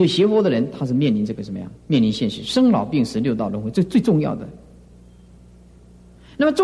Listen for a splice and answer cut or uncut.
cut